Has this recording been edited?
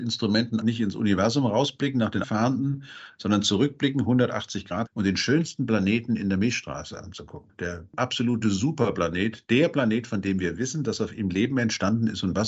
yes; 2 cuts; at 2.2 s, 4.9 s

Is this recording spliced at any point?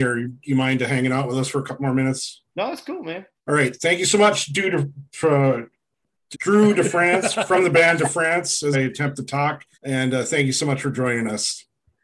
yes; 5 cuts; at 2.5 s, 3.4 s, 6.3 s, 8.7 s, 9.7 s

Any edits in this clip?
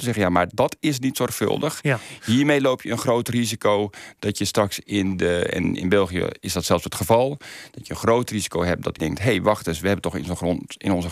yes; 1 cut; at 9.0 s

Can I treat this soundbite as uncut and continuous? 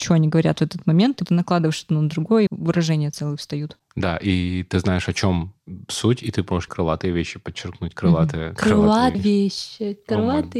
no; 4 cuts; at 1.3 s, 2.5 s, 6.7 s, 9.1 s

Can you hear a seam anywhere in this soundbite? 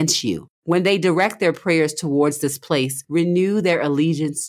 no; 0 cuts

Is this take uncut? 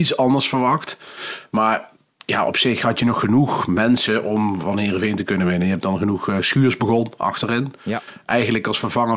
yes; 0 cuts

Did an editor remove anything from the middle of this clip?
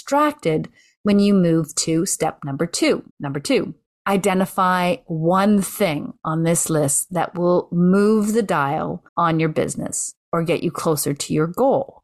yes; 3 cuts; at 3.1 s, 3.9 s, 9.1 s

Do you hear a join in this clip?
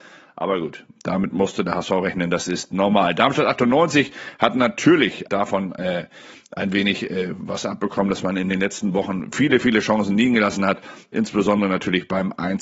yes; 1 cut; at 5.3 s

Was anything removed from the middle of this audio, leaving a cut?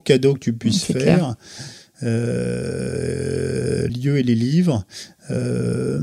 yes; 1 cut; at 3.9 s

